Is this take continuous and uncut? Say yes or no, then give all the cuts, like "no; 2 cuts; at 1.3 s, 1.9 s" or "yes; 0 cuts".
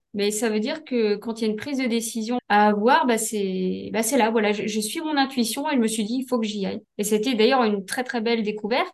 no; 1 cut; at 2.4 s